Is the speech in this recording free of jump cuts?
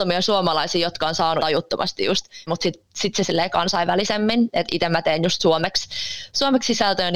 no; 3 cuts; at 1.4 s, 2.5 s, 3.2 s

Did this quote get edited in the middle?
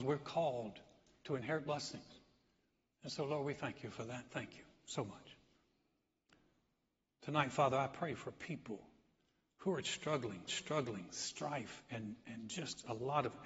yes; 1 cut; at 10.5 s

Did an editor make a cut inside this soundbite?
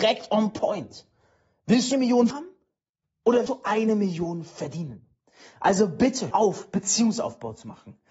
yes; 4 cuts; at 1.9 s, 2.3 s, 3.5 s, 6.3 s

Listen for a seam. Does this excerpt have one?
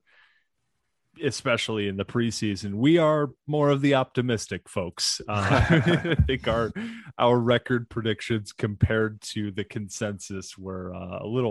no; 0 cuts

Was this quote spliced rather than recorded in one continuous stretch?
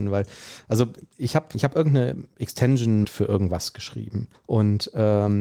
yes; 3 cuts; at 1.5 s, 3.0 s, 4.3 s

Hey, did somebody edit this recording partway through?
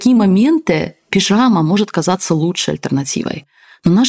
no; 0 cuts

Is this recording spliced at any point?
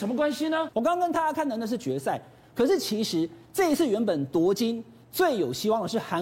no; 0 cuts

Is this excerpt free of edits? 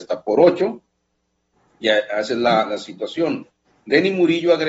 yes; 0 cuts

